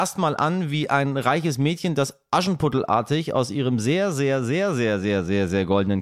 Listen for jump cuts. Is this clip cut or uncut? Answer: uncut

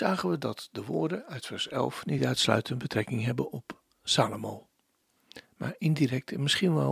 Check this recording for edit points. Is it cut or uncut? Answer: uncut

